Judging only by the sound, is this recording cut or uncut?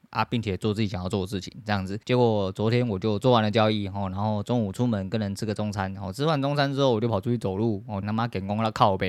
cut